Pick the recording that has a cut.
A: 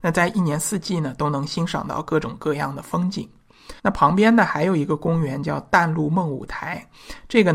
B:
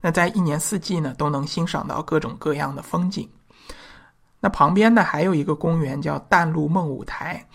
A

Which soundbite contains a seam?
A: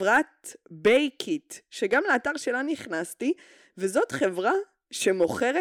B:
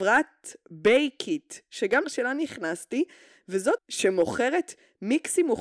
B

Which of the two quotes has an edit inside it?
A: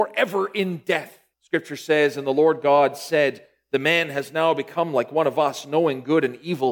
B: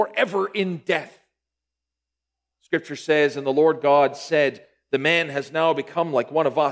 A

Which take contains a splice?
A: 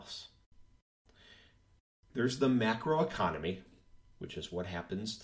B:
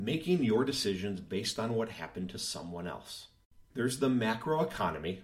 B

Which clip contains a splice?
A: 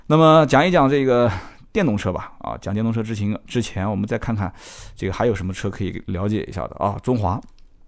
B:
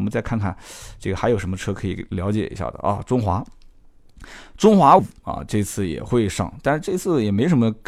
B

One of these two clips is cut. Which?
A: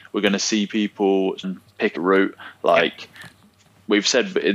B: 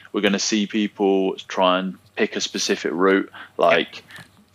A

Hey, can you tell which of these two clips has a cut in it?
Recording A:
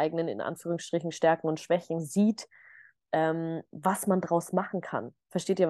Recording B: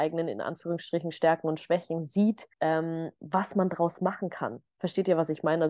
B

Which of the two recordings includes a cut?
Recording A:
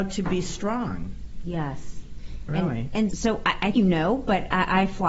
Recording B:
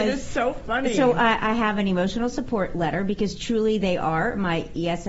A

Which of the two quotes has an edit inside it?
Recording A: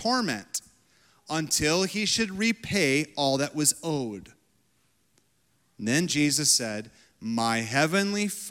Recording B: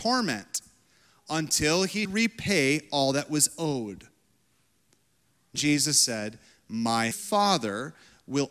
B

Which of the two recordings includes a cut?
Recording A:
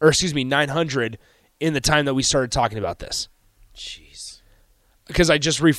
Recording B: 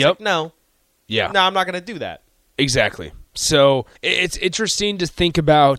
B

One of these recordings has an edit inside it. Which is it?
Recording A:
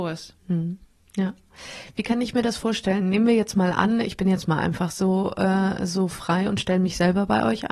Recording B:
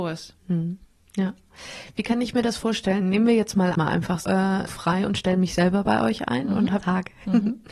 B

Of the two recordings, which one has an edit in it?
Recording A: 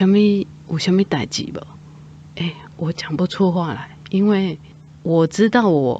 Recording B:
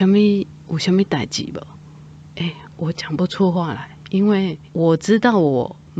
B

